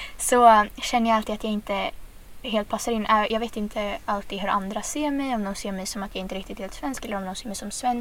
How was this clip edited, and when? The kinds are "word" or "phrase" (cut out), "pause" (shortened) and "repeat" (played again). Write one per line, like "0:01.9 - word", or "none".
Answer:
0:02.4 - word